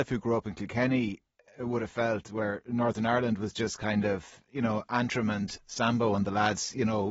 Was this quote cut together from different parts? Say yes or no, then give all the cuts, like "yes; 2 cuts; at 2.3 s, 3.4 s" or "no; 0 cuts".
no; 0 cuts